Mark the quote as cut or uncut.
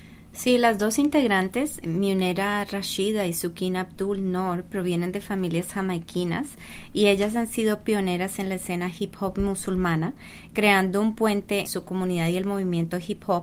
cut